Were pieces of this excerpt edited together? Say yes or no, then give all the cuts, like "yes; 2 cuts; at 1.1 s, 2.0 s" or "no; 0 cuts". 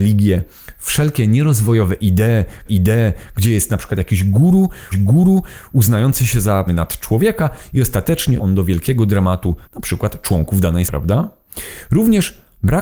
yes; 6 cuts; at 2.6 s, 4.9 s, 6.7 s, 8.4 s, 9.6 s, 10.9 s